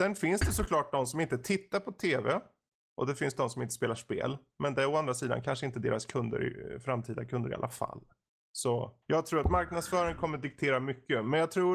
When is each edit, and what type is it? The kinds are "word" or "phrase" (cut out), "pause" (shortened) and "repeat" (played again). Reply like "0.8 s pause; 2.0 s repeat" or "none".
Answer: 9.0 s pause

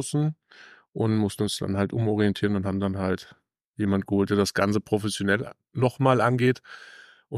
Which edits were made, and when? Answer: none

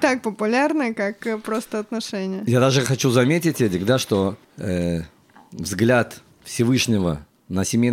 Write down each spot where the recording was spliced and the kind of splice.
4.4 s pause; 6.3 s pause

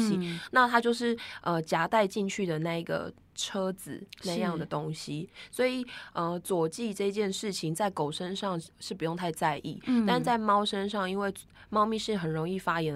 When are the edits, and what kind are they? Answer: none

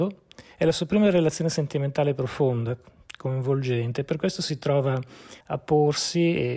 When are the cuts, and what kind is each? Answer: 5.4 s pause

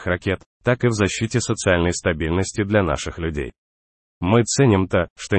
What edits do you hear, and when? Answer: none

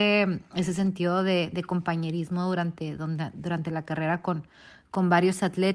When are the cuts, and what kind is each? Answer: none

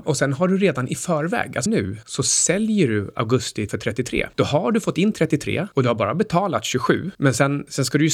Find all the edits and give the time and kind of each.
1.7 s word; 3.7 s word

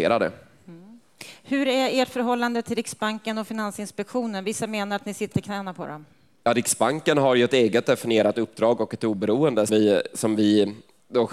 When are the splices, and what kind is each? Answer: 5.3 s word; 9.7 s word

